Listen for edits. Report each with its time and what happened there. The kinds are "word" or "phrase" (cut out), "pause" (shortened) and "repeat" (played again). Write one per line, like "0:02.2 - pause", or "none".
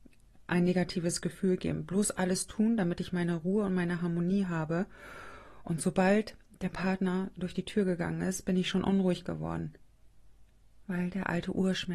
none